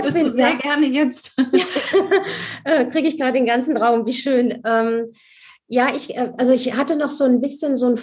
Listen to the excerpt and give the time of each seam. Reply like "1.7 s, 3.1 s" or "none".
none